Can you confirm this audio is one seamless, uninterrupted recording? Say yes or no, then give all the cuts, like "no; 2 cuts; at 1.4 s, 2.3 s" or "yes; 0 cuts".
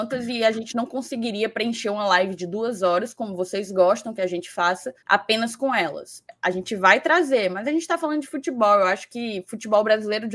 no; 1 cut; at 5.0 s